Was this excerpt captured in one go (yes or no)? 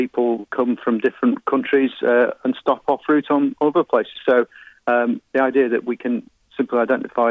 yes